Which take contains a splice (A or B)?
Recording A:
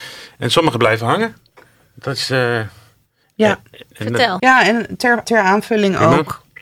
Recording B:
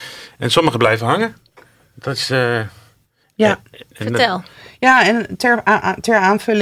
A